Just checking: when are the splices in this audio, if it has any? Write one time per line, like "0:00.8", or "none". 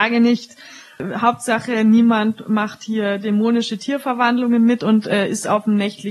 none